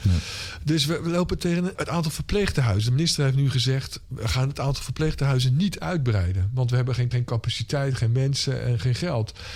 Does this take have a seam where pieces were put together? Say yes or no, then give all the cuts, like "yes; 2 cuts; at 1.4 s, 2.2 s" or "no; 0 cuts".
yes; 2 cuts; at 1.7 s, 7.1 s